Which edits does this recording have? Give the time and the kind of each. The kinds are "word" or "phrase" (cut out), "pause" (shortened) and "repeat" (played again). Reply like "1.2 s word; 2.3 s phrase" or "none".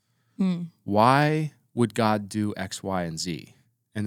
none